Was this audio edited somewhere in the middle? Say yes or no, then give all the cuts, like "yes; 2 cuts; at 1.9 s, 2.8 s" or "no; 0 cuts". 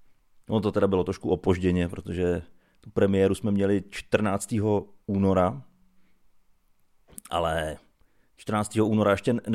no; 0 cuts